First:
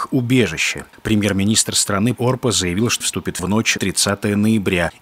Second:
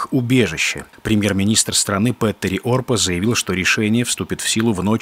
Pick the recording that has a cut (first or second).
first